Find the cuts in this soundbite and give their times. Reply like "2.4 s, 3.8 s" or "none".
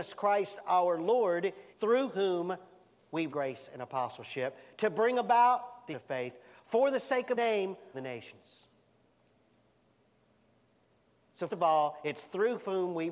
1.7 s, 3.3 s, 5.9 s, 7.3 s, 7.9 s, 11.5 s